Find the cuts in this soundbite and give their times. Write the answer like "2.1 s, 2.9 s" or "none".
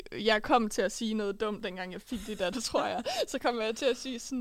2.5 s